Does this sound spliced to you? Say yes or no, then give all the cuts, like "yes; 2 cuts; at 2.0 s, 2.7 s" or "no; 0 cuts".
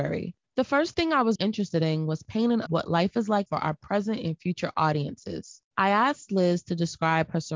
yes; 3 cuts; at 1.4 s, 2.7 s, 3.5 s